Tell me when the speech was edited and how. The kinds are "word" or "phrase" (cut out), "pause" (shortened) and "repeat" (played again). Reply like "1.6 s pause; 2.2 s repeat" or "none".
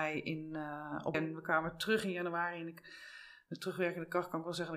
1.1 s word